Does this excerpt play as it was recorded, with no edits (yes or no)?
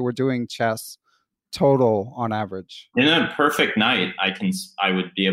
yes